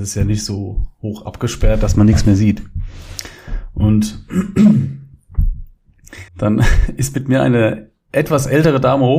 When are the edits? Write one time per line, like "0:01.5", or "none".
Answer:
0:06.3